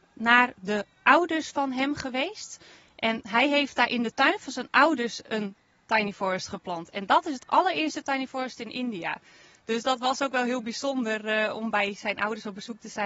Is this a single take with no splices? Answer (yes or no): yes